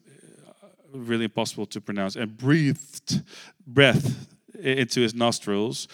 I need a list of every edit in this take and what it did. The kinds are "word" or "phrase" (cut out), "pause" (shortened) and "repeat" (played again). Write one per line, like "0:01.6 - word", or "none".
none